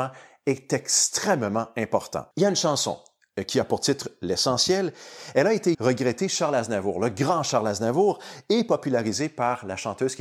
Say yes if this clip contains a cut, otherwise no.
yes